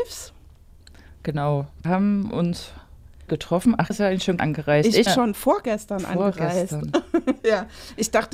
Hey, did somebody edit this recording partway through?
yes; 5 cuts; at 1.8 s, 3.3 s, 3.9 s, 4.4 s, 5.1 s

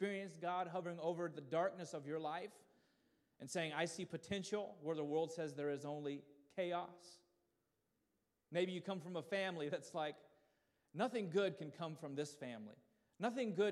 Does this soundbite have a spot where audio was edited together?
no; 0 cuts

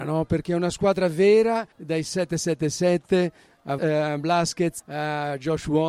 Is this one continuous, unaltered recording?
no; 3 cuts; at 1.7 s, 3.8 s, 4.8 s

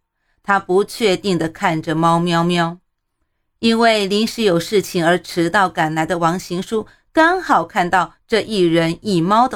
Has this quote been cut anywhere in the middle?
no; 0 cuts

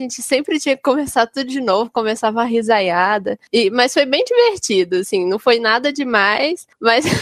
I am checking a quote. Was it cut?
no; 0 cuts

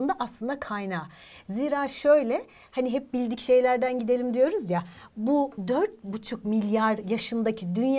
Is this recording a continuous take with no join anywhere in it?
yes; 0 cuts

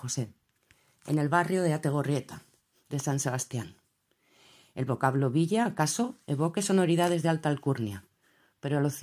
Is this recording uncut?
yes; 0 cuts

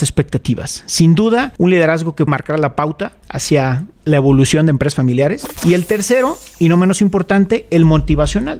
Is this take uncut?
no; 1 cut; at 2.3 s

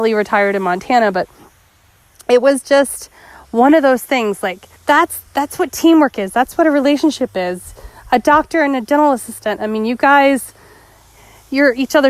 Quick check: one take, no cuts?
no; 1 cut; at 4.8 s

